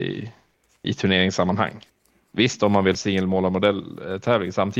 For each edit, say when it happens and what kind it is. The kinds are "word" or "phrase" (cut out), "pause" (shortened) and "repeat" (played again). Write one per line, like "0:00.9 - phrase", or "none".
0:01.9 - pause
0:02.9 - word